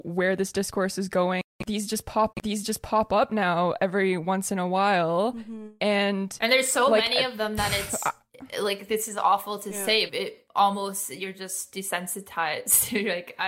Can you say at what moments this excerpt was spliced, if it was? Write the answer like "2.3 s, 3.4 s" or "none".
2.3 s, 10.1 s